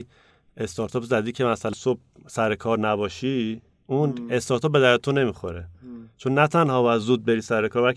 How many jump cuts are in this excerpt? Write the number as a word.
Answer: one